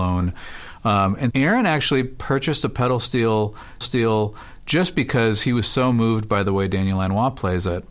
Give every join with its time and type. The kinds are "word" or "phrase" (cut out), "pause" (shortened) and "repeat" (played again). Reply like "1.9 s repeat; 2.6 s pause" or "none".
1.3 s word; 3.8 s repeat